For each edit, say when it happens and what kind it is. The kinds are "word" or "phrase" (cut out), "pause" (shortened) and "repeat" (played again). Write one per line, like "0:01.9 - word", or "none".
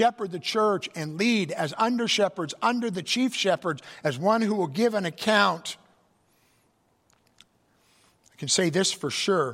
none

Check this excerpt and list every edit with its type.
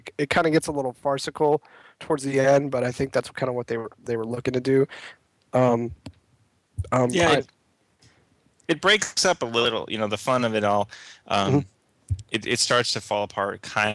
none

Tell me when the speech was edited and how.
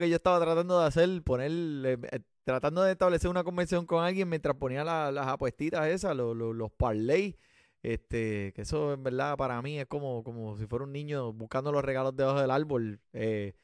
none

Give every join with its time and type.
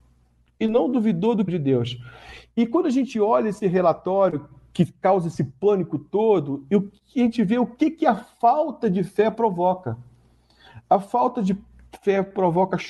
0:01.5 - phrase

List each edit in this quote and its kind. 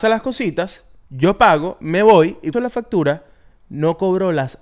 0:02.5 - phrase

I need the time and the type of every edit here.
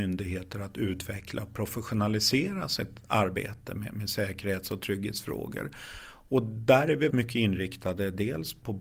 0:07.1 - word

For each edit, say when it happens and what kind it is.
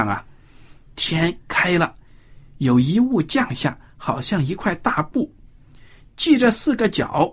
none

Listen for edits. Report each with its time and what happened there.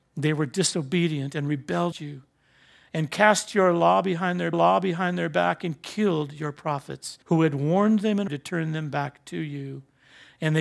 0:01.9 - word
0:04.5 - repeat
0:07.2 - pause
0:08.3 - word

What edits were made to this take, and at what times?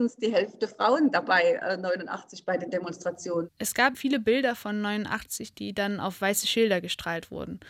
0:03.9 - word

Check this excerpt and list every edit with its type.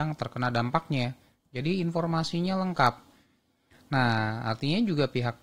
none

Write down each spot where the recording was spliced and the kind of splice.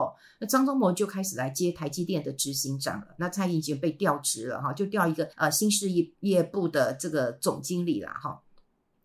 0:05.3 - pause
0:06.2 - pause

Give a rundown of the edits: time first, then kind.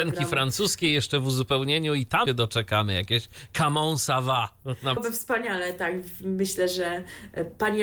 0:02.3 - word
0:05.0 - word

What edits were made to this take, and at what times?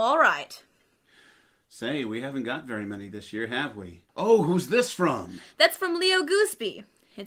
0:04.1 - pause

